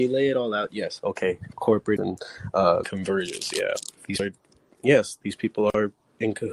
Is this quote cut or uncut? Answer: cut